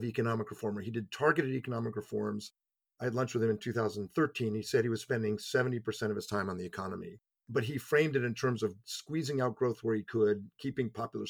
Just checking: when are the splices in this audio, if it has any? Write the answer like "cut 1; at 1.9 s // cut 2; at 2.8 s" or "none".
none